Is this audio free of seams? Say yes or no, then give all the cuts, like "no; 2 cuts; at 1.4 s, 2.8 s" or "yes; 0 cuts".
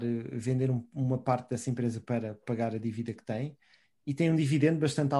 yes; 0 cuts